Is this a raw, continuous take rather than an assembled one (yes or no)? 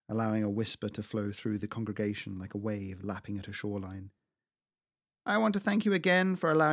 yes